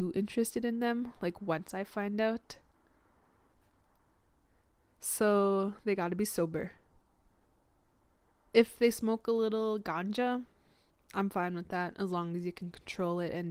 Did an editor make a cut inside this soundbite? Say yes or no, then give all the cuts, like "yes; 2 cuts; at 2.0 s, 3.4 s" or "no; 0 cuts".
no; 0 cuts